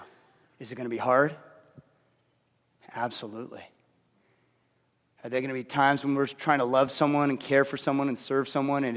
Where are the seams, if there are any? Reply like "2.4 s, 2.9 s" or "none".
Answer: none

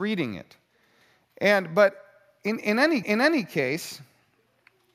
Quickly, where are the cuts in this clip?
3.0 s

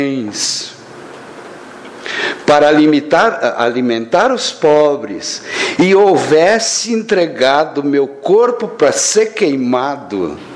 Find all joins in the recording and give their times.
none

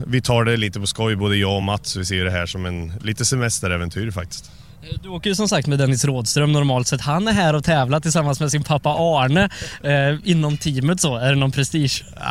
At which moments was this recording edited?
none

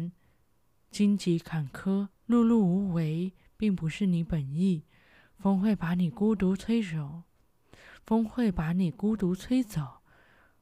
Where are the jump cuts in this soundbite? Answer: 2.1 s

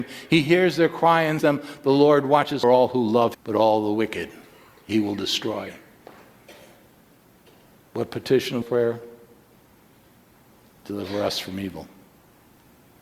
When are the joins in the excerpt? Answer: 1.4 s, 2.6 s, 3.3 s, 8.6 s

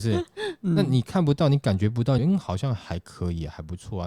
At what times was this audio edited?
2.2 s

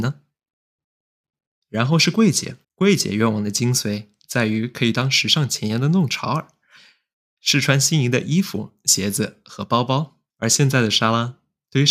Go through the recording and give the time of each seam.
2.6 s, 10.3 s

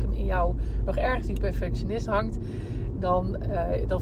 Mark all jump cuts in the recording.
none

